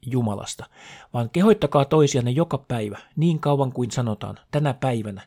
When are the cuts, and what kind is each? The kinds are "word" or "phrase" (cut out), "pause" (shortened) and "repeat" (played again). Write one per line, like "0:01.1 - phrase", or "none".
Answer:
none

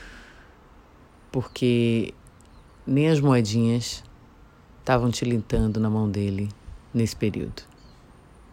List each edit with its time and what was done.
none

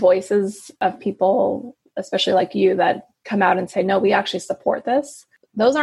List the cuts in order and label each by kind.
none

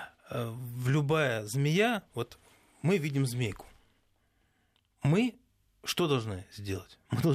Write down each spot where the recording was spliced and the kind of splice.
none

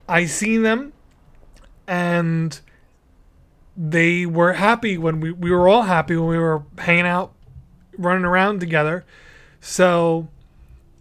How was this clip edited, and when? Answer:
none

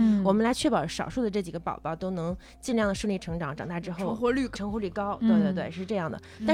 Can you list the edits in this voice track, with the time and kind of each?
0:04.5 - word

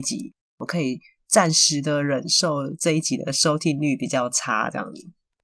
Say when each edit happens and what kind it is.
none

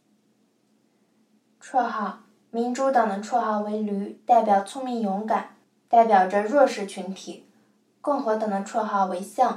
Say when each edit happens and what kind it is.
0:05.6 - pause

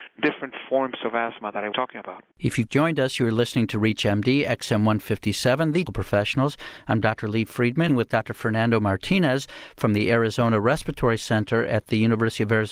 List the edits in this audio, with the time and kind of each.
0:01.7 - word
0:02.3 - pause
0:02.7 - word
0:05.9 - phrase
0:07.9 - phrase

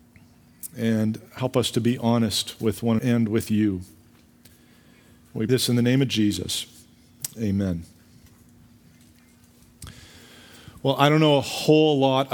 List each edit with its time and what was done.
0:03.0 - word
0:05.5 - word

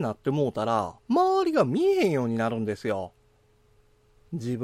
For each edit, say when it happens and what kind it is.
0:01.0 - pause

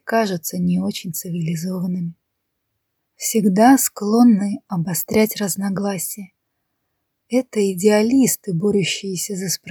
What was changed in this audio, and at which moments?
none

